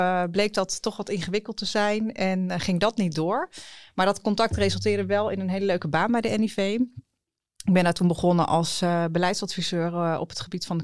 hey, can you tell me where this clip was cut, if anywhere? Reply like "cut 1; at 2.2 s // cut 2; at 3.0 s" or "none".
none